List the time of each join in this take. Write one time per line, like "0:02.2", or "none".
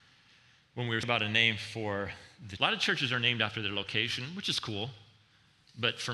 0:01.0
0:02.6

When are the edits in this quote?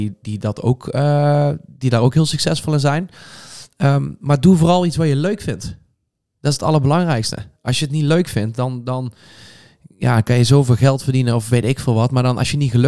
none

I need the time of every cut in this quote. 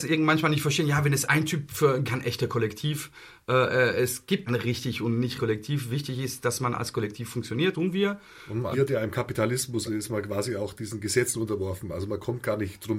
0:02.0
0:04.5
0:05.4
0:07.7
0:08.7
0:09.9

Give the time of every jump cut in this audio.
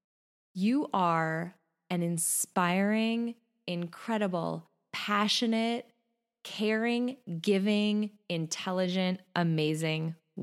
none

